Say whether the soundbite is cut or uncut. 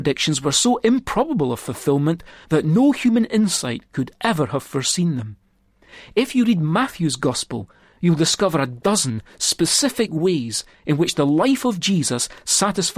uncut